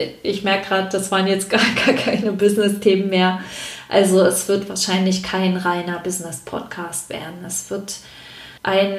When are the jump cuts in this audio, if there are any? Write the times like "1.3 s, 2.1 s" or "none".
none